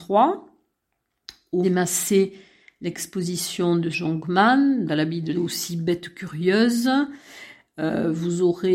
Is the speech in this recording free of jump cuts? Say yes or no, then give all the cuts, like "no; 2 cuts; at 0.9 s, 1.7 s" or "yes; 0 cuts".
no; 4 cuts; at 1.6 s, 3.9 s, 4.9 s, 5.3 s